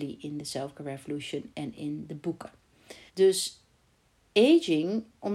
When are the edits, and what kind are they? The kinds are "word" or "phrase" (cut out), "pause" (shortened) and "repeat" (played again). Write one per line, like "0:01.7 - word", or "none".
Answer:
0:03.1 - pause